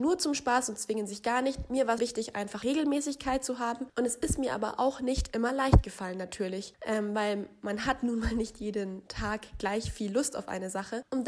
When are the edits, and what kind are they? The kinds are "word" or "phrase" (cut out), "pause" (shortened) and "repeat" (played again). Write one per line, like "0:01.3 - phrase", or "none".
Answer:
0:02.0 - word
0:02.6 - word